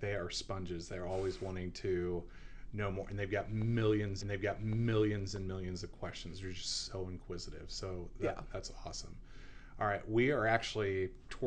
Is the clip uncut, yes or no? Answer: no